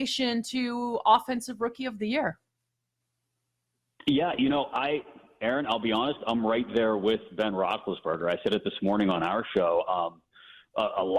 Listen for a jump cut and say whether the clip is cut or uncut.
uncut